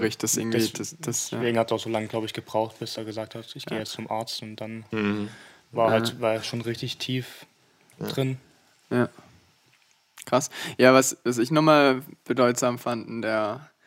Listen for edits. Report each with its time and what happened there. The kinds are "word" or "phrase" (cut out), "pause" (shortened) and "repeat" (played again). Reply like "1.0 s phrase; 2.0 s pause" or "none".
none